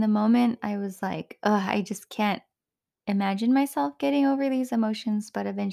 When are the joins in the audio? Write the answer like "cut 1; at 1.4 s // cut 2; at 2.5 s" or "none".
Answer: none